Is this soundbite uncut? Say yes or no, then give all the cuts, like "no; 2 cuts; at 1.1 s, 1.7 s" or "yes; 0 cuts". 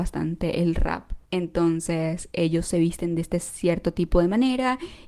no; 1 cut; at 1.3 s